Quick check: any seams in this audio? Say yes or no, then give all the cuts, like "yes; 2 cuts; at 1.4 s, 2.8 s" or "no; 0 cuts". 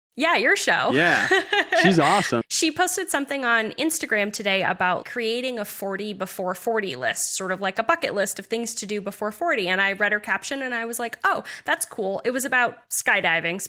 yes; 2 cuts; at 2.4 s, 5.0 s